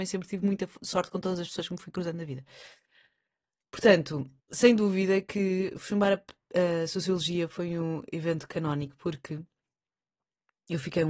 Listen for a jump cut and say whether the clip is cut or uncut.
cut